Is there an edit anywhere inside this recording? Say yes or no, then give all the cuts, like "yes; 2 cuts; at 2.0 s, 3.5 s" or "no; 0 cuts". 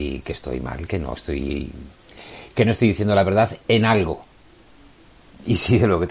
no; 0 cuts